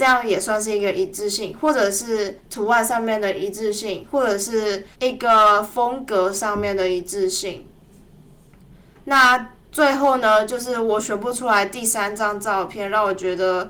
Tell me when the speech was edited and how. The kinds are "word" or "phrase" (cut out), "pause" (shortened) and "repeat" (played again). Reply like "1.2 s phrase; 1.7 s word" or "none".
4.9 s pause